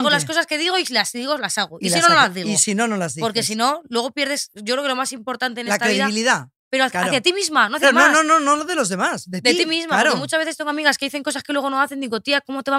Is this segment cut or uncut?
cut